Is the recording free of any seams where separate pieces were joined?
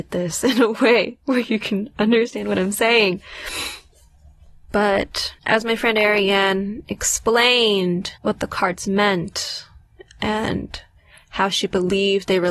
no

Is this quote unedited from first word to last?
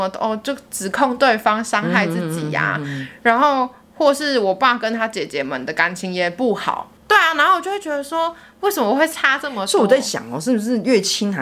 yes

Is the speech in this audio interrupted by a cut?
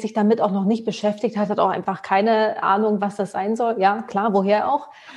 no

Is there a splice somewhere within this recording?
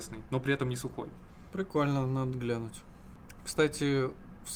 yes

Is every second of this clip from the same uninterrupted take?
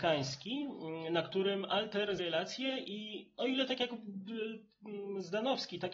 no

